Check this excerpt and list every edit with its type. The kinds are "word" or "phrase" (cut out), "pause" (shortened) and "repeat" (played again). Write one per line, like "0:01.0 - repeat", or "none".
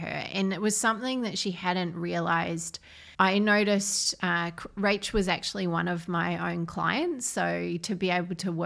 0:03.1 - pause